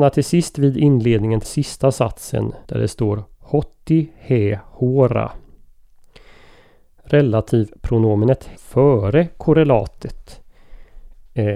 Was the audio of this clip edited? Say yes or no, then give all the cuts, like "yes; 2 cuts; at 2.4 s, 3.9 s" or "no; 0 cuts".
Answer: yes; 3 cuts; at 1.4 s, 2.6 s, 8.5 s